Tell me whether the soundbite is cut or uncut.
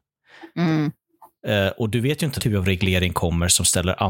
cut